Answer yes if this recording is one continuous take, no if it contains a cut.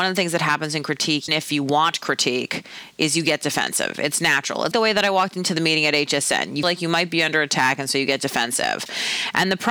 no